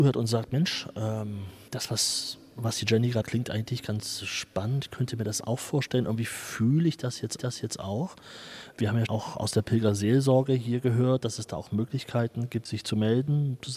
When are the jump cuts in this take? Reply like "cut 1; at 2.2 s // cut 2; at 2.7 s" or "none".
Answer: cut 1; at 1.7 s // cut 2; at 3.2 s // cut 3; at 7.4 s // cut 4; at 9.1 s // cut 5; at 12.7 s

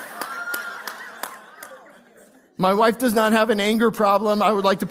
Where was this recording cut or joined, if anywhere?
none

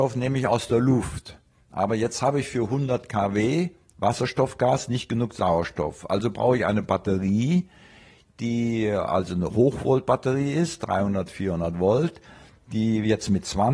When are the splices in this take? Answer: none

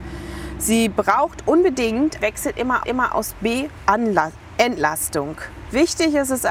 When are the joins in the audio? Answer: cut 1; at 2.2 s // cut 2; at 2.8 s // cut 3; at 3.8 s

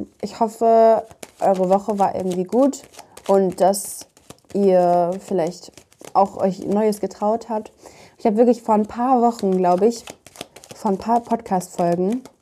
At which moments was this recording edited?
none

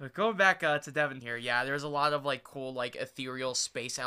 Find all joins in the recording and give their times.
cut 1; at 1.2 s

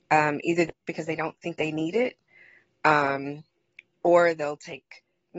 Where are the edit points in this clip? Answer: none

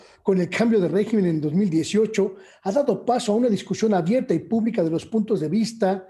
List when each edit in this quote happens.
none

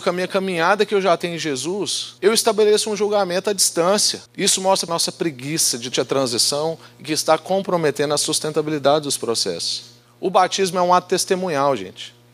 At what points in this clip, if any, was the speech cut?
cut 1; at 2.2 s // cut 2; at 4.3 s // cut 3; at 4.9 s // cut 4; at 5.9 s

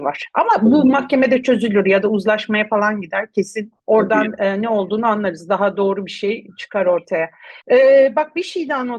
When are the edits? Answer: cut 1; at 3.8 s // cut 2; at 7.6 s

